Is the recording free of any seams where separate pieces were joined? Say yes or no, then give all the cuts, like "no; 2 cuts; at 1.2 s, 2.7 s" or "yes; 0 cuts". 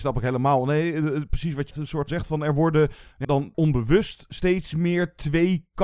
no; 4 cuts; at 1.7 s, 2.1 s, 3.2 s, 3.5 s